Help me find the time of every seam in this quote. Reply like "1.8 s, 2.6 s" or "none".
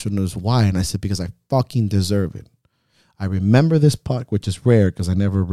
none